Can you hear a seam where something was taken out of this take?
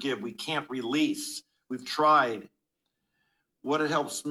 no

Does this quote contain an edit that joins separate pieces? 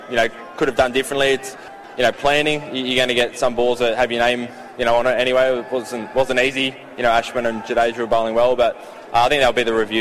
no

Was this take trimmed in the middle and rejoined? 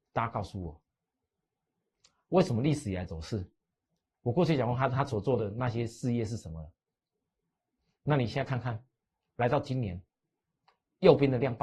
no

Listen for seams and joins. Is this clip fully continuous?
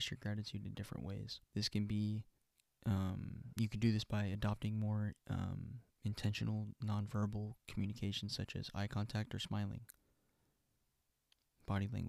no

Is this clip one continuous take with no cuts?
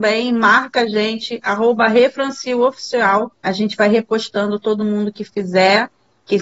yes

